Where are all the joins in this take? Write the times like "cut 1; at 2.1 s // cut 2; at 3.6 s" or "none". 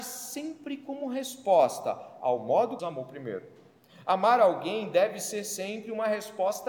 cut 1; at 2.8 s

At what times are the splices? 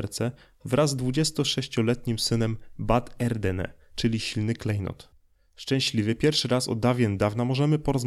none

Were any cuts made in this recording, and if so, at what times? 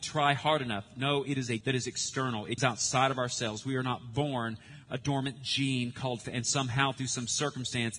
cut 1; at 1.6 s // cut 2; at 2.6 s // cut 3; at 4.9 s // cut 4; at 6.2 s

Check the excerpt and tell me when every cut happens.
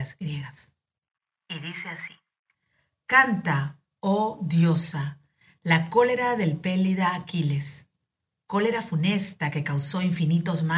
none

